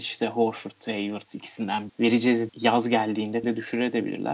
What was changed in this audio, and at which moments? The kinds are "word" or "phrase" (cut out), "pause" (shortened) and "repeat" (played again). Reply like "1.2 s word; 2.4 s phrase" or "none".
1.9 s word; 2.5 s word; 3.4 s word

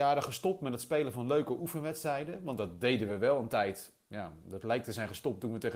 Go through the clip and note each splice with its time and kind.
none

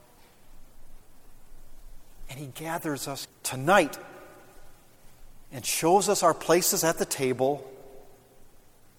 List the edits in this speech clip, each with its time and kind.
3.2 s word

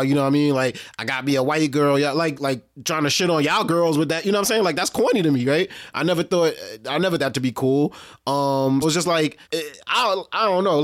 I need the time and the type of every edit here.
2.4 s word; 7.2 s word; 8.8 s word; 9.4 s pause

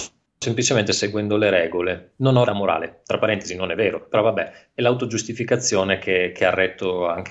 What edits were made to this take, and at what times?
2.5 s word

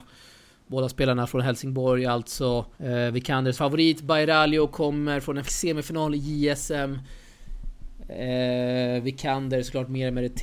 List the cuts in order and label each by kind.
2.7 s pause; 3.5 s word; 5.4 s word

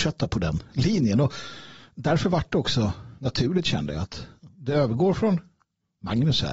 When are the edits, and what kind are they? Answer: 3.2 s pause

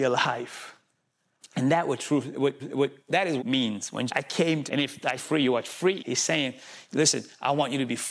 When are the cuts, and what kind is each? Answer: 2.6 s repeat; 3.4 s phrase; 4.1 s phrase; 4.7 s phrase; 5.2 s phrase; 6.0 s word

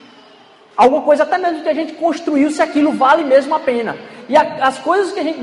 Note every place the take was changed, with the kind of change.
none

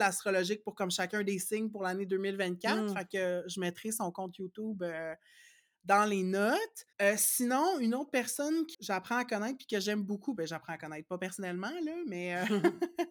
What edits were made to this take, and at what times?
6.9 s pause; 8.7 s word

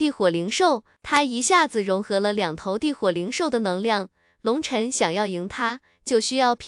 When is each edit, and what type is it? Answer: none

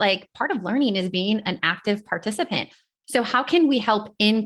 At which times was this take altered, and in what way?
none

